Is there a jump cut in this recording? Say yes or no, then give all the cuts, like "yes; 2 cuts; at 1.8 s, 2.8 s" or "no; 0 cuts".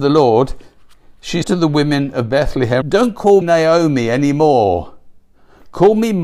yes; 3 cuts; at 1.4 s, 2.8 s, 3.4 s